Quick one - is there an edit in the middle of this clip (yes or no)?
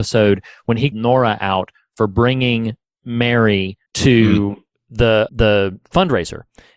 yes